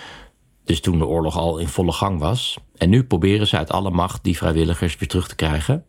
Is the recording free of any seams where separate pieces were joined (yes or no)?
no